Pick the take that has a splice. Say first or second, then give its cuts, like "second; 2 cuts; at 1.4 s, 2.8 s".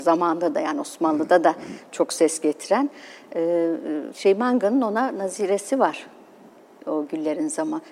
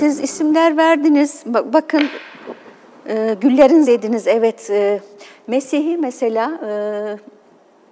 second; 1 cut; at 3.8 s